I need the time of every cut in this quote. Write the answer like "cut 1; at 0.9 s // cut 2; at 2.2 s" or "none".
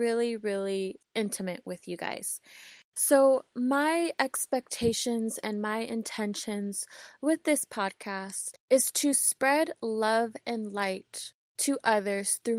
none